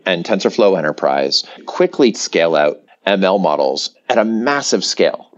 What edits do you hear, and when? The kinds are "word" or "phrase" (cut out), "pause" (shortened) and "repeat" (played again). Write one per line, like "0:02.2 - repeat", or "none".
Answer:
0:01.6 - word
0:02.1 - phrase
0:02.9 - pause